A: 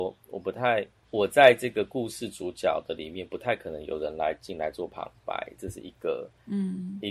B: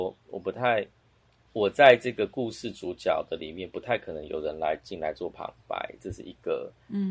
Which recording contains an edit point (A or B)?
A